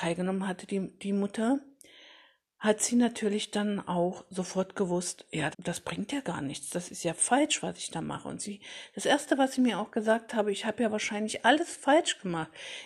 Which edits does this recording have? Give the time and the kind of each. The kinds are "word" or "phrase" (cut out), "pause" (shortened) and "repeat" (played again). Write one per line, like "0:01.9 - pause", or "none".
0:05.5 - word